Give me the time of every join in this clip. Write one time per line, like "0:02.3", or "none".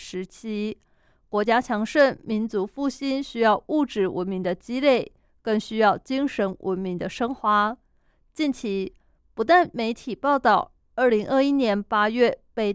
none